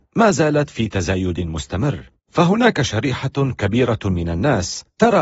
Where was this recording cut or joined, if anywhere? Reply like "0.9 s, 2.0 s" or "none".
2.2 s